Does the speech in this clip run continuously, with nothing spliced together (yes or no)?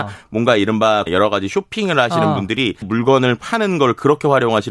no